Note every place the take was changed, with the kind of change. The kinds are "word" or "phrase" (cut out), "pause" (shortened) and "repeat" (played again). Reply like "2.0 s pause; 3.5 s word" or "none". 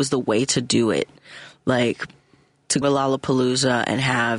2.8 s word